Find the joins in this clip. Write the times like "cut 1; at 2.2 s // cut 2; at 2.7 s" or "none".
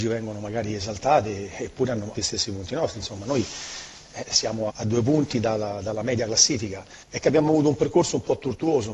cut 1; at 2.1 s // cut 2; at 4.7 s // cut 3; at 7.0 s